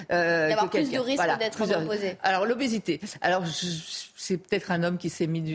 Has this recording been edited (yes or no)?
no